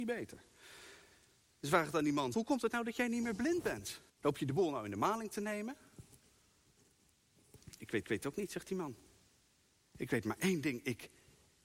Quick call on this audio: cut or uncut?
cut